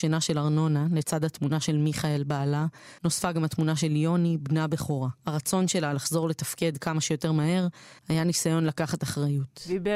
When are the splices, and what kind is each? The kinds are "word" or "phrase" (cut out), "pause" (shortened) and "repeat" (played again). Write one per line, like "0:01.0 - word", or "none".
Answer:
0:03.0 - pause
0:05.2 - pause
0:08.0 - pause